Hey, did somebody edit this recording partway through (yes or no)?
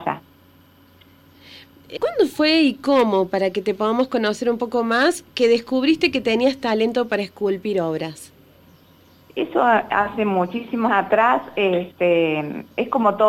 yes